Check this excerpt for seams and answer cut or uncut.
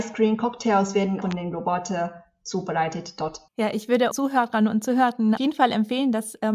cut